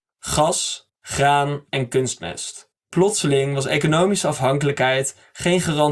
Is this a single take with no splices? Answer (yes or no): no